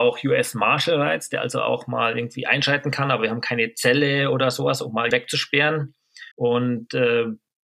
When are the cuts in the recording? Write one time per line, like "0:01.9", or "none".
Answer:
0:05.1
0:06.3